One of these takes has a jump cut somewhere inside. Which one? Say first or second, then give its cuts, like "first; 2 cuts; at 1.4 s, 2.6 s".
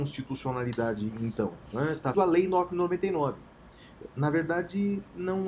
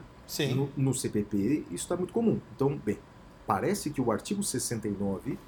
first; 1 cut; at 2.1 s